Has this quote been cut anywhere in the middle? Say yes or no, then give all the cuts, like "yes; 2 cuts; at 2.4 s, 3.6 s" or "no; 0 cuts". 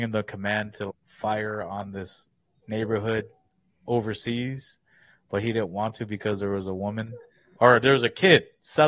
yes; 1 cut; at 0.9 s